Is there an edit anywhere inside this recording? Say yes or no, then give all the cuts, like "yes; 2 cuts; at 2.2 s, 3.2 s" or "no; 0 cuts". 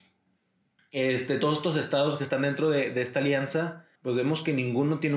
yes; 1 cut; at 4.0 s